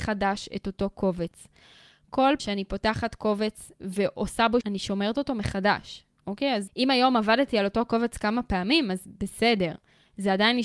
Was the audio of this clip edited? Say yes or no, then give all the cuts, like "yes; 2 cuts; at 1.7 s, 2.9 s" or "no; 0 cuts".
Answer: yes; 4 cuts; at 2.4 s, 3.8 s, 4.6 s, 6.7 s